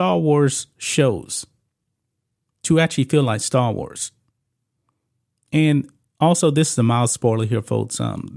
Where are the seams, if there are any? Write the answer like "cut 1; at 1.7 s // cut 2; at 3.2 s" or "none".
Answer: none

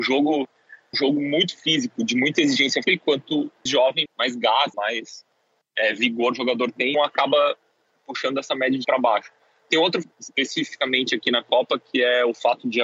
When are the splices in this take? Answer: cut 1; at 0.9 s // cut 2; at 2.8 s // cut 3; at 3.7 s // cut 4; at 4.1 s // cut 5; at 4.7 s // cut 6; at 6.9 s // cut 7; at 8.8 s // cut 8; at 10.0 s

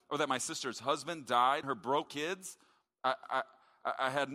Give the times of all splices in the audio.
cut 1; at 1.6 s // cut 2; at 2.1 s

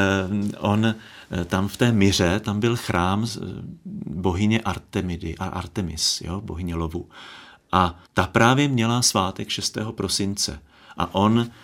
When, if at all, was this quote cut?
cut 1; at 3.3 s // cut 2; at 8.1 s

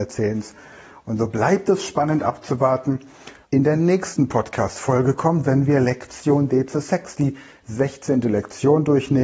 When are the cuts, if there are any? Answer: cut 1; at 3.4 s

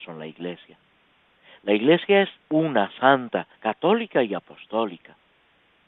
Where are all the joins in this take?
cut 1; at 2.4 s // cut 2; at 3.5 s

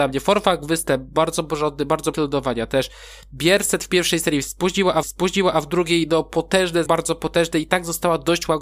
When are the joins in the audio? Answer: cut 1; at 2.1 s // cut 2; at 5.0 s // cut 3; at 6.9 s

